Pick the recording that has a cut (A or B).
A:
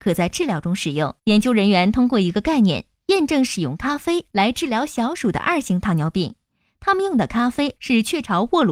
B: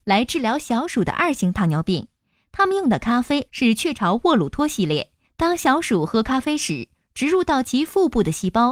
A